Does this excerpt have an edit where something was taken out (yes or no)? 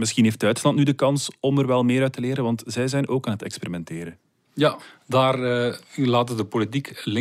no